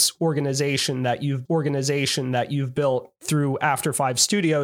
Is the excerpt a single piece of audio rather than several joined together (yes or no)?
no